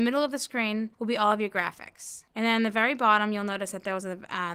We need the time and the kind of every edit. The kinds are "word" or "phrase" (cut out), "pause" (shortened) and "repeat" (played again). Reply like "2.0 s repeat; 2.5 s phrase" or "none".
0.9 s pause; 2.3 s pause